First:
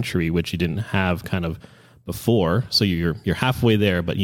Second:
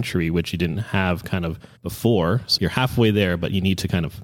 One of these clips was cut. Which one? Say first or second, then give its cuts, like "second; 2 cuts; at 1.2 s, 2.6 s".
second; 2 cuts; at 1.8 s, 2.6 s